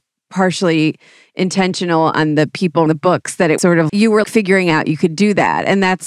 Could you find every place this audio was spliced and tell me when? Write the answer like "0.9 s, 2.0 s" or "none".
2.9 s, 3.6 s, 3.9 s, 4.2 s